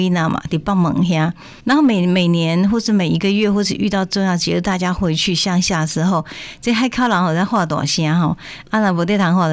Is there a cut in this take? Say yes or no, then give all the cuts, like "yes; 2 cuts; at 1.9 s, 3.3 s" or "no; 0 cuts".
yes; 1 cut; at 1.6 s